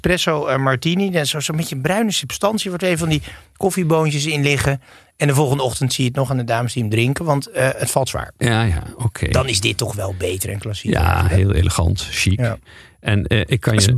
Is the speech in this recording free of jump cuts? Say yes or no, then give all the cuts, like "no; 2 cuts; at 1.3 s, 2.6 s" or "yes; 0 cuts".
yes; 0 cuts